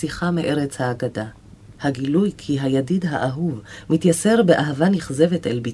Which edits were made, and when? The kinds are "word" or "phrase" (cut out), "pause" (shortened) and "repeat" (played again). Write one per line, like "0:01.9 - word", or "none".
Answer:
0:01.8 - pause